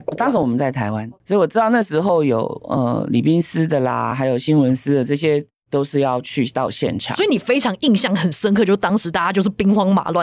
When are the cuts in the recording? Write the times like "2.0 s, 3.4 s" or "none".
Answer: none